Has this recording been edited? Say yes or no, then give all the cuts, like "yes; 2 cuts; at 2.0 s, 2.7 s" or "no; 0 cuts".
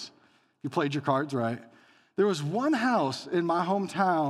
no; 0 cuts